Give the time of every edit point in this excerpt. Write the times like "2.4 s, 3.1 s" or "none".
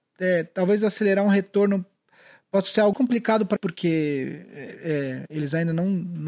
2.9 s, 3.6 s